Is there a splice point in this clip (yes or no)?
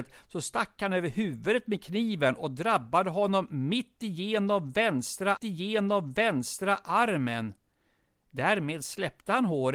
yes